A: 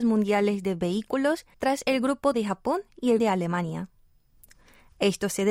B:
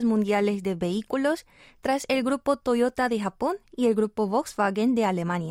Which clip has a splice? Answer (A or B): A